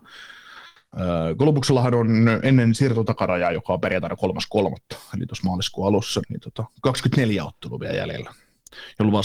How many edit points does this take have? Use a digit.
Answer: 1